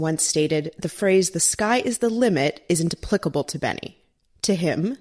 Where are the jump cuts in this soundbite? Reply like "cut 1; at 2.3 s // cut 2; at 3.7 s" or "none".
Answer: none